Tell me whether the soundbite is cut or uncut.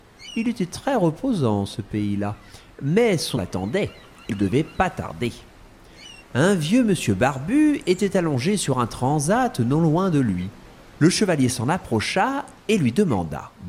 cut